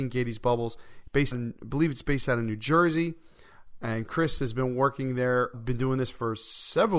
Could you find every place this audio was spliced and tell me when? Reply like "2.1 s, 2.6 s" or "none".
1.3 s, 5.5 s